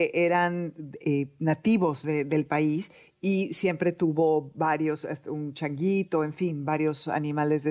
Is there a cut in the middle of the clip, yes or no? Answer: no